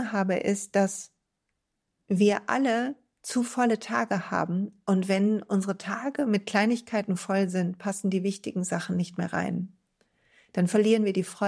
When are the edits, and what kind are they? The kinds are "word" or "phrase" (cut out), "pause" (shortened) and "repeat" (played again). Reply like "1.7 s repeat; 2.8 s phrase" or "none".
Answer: none